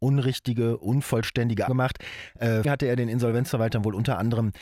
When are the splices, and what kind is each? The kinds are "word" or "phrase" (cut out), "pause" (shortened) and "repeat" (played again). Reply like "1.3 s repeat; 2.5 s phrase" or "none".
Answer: 1.7 s word; 2.6 s word